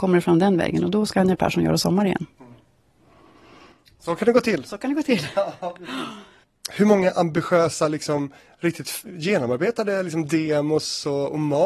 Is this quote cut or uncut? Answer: uncut